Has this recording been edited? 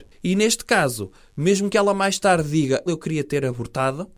yes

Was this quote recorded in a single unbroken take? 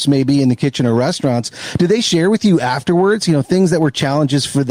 yes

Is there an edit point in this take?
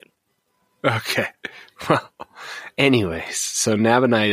no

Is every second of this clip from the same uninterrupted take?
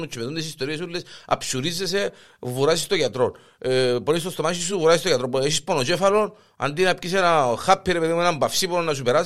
yes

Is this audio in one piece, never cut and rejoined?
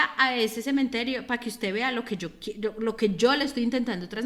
yes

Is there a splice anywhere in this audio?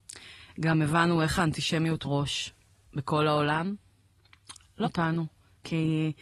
yes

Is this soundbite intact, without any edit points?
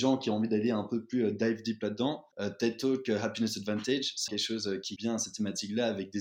no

